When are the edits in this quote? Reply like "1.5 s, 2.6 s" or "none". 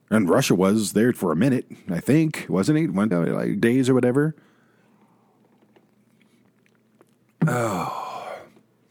1.1 s, 3.1 s, 3.6 s